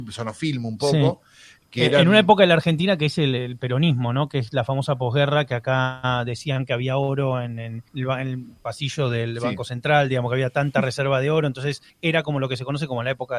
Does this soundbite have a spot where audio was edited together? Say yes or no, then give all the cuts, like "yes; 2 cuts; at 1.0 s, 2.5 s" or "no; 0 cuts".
yes; 2 cuts; at 7.9 s, 11.9 s